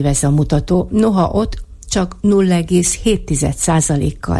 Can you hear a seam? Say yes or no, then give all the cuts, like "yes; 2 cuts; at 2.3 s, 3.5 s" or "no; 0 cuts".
no; 0 cuts